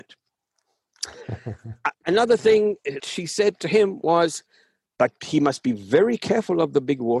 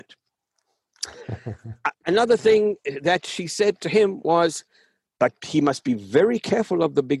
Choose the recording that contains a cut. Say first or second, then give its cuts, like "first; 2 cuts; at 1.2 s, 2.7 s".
first; 1 cut; at 3.0 s